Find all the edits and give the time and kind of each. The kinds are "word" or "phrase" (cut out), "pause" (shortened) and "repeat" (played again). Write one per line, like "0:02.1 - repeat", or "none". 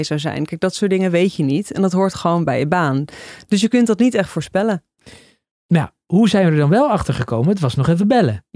none